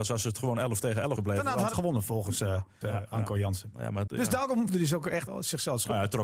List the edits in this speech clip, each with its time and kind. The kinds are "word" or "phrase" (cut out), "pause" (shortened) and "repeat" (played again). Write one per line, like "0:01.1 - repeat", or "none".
0:01.2 - word
0:01.7 - word
0:02.8 - word
0:04.1 - word
0:04.7 - word
0:05.3 - word